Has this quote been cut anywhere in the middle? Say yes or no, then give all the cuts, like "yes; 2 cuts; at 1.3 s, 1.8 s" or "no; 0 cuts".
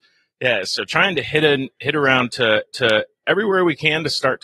yes; 1 cut; at 2.7 s